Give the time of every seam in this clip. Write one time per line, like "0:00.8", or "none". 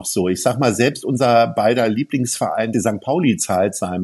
0:02.7